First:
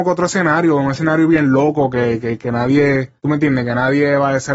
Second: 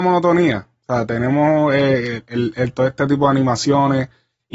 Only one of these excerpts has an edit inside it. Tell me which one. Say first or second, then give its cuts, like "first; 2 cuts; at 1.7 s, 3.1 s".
first; 1 cut; at 3.2 s